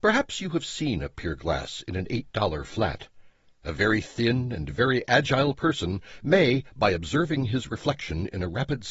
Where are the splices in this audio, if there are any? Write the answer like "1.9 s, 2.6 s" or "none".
none